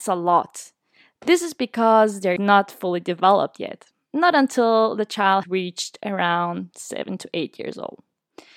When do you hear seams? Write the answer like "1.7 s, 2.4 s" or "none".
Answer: 2.4 s, 5.4 s